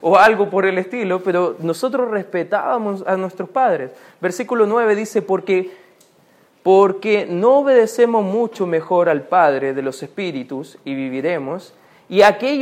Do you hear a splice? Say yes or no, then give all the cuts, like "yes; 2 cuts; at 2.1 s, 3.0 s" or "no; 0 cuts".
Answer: no; 0 cuts